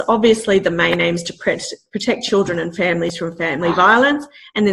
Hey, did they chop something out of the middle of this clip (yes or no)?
no